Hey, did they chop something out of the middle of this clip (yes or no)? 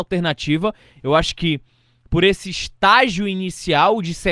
no